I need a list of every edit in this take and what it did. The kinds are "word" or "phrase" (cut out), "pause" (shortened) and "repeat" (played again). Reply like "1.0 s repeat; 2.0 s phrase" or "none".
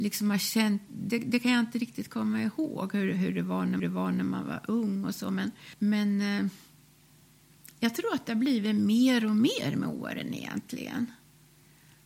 3.8 s repeat